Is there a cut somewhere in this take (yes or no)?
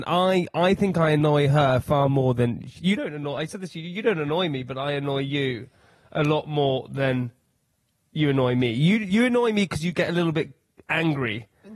no